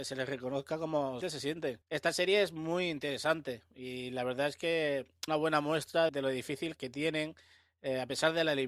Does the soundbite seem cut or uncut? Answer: cut